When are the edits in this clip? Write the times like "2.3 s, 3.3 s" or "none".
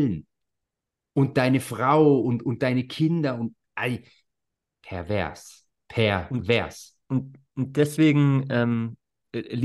7.0 s